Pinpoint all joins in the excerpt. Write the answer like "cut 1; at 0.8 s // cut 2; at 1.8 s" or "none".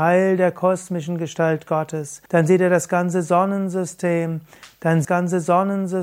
cut 1; at 2.3 s // cut 2; at 5.0 s